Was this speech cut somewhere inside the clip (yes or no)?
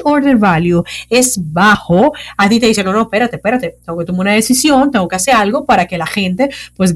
no